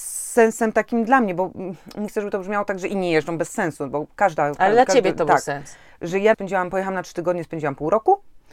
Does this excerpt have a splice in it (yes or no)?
yes